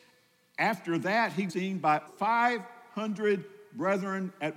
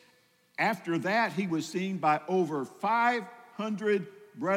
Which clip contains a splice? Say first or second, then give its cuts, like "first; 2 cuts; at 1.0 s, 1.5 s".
first; 2 cuts; at 1.5 s, 2.1 s